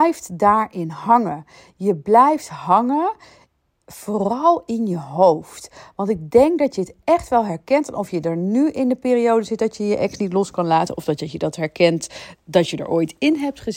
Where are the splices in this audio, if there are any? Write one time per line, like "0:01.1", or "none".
none